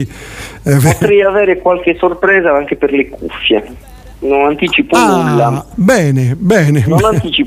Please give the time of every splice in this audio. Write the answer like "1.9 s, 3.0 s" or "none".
none